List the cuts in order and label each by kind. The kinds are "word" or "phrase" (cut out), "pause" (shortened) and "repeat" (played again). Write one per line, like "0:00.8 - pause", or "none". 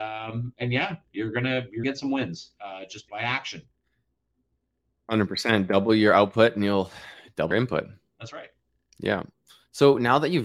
0:01.8 - word
0:03.1 - word
0:07.5 - word